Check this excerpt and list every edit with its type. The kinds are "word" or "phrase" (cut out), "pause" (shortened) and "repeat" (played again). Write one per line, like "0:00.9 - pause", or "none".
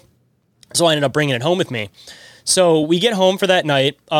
none